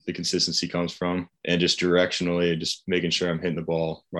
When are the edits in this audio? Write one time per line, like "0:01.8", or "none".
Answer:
0:01.3